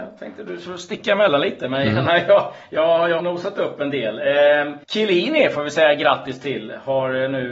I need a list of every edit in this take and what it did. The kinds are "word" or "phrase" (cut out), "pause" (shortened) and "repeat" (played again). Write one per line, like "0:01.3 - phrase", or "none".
0:03.2 - word
0:04.8 - pause